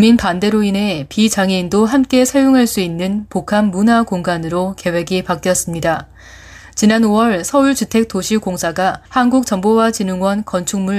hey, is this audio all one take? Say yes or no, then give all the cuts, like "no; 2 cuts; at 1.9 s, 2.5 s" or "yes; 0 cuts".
no; 1 cut; at 9.1 s